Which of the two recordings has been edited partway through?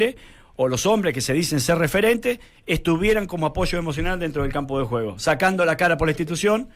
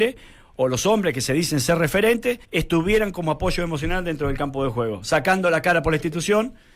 second; 1 cut; at 2.4 s

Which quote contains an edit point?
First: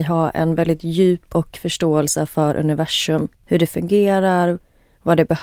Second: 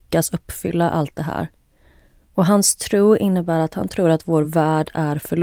first; 2 cuts; at 1.5 s, 3.3 s

